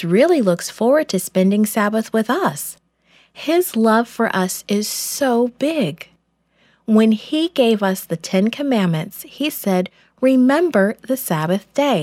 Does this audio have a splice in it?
no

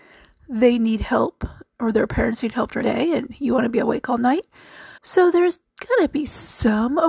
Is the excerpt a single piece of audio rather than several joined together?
no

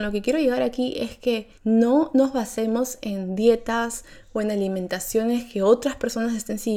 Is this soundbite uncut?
no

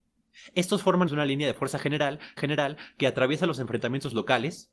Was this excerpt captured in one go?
no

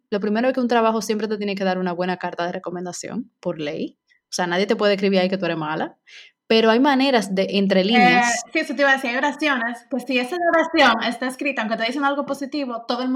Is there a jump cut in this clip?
no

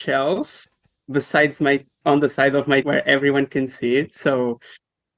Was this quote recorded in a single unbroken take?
no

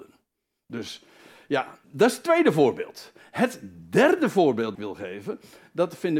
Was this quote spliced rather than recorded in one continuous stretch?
yes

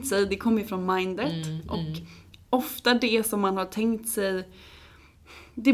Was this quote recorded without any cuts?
yes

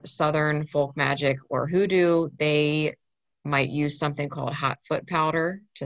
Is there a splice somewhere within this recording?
no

